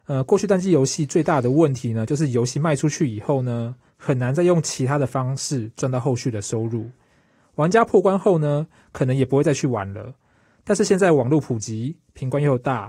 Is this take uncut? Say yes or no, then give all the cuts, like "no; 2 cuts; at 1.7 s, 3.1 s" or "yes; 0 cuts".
yes; 0 cuts